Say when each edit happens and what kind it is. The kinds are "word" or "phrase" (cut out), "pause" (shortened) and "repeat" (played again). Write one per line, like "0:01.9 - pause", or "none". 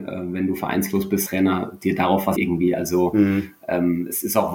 0:01.3 - word
0:02.4 - word

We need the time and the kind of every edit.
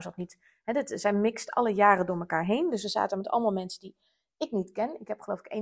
none

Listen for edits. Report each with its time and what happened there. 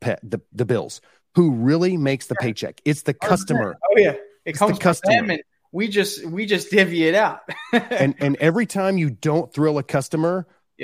none

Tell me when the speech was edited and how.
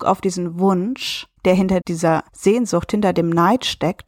0:01.4 - pause
0:01.8 - word
0:02.3 - pause

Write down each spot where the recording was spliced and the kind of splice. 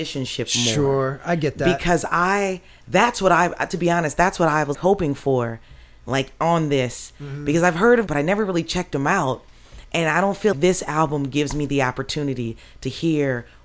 0:04.7 - word
0:08.1 - word
0:10.5 - word

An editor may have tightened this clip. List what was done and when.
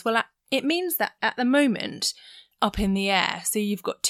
0:01.2 - word
0:02.5 - word

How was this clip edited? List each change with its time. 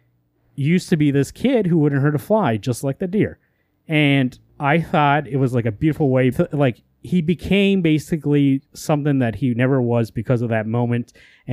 0:04.5 - word
0:06.3 - phrase

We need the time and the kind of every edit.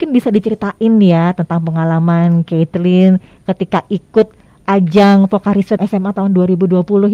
0:05.8 - word

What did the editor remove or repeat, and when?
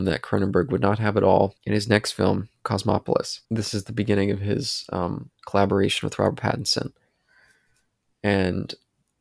0:01.6 - pause
0:03.4 - pause
0:05.3 - pause

